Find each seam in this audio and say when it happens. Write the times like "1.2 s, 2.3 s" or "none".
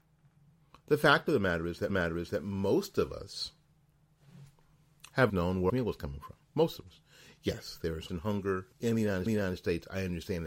1.9 s, 5.3 s, 5.7 s, 6.4 s, 8.1 s, 8.7 s, 9.3 s